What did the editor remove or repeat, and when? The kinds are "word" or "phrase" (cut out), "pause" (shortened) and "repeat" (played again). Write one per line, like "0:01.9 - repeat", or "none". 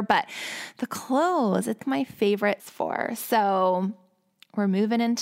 0:01.8 - word
0:02.6 - phrase